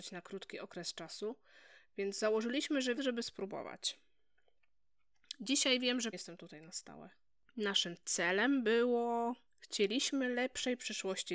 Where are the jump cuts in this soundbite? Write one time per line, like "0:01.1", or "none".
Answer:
0:03.0
0:06.1